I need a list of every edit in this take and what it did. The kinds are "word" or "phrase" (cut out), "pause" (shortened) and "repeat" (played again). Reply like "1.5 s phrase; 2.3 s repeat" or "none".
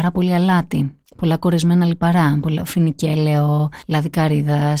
none